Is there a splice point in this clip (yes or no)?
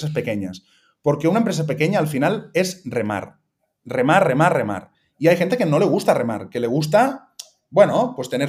no